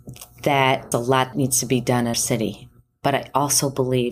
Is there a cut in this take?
yes; 3 cuts; at 0.9 s, 1.3 s, 2.1 s

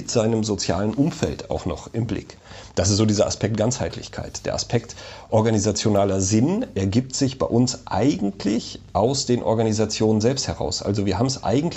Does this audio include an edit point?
no; 0 cuts

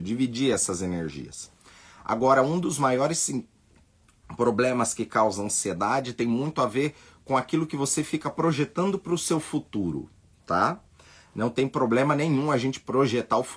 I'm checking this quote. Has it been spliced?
no; 0 cuts

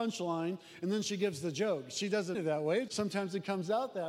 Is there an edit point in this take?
yes; 2 cuts; at 2.3 s, 2.9 s

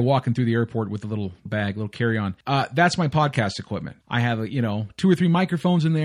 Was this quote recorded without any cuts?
no; 3 cuts; at 1.5 s, 2.4 s, 4.0 s

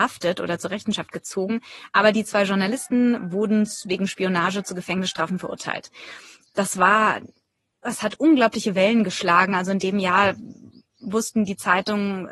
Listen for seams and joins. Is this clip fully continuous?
yes; 0 cuts

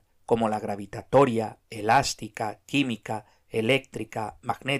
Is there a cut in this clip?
no; 0 cuts

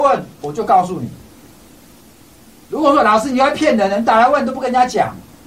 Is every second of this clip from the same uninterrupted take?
yes; 0 cuts

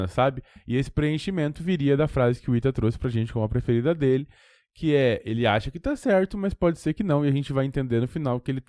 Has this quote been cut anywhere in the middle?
no; 0 cuts

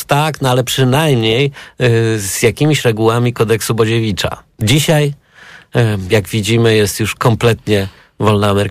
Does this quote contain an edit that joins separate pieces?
no; 0 cuts

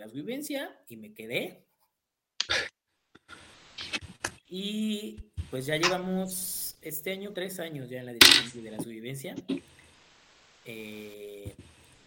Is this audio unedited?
no; 1 cut; at 7.3 s

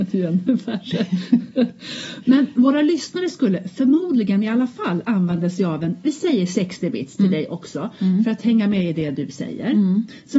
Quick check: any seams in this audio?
no; 0 cuts

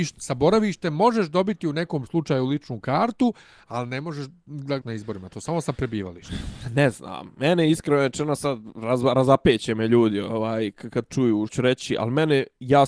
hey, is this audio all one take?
no; 2 cuts; at 4.8 s, 11.5 s

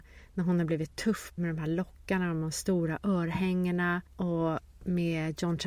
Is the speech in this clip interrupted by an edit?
yes; 2 cuts; at 1.4 s, 4.1 s

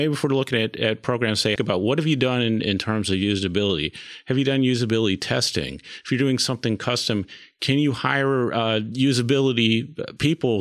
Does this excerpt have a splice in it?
yes; 1 cut; at 1.6 s

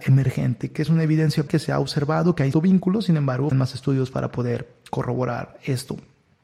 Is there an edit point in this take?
yes; 3 cuts; at 1.5 s, 2.5 s, 3.5 s

